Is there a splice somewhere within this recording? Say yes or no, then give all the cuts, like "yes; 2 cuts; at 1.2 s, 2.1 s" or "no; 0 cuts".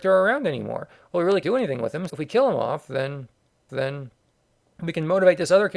yes; 3 cuts; at 1.4 s, 2.1 s, 3.7 s